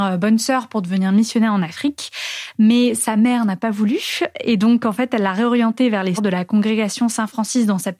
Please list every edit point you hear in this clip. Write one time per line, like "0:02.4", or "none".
0:06.2